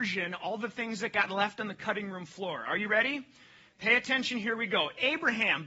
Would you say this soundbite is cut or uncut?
uncut